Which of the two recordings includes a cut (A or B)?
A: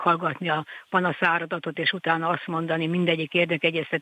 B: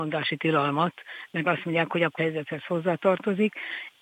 B